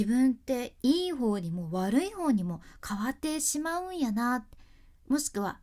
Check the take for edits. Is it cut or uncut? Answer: cut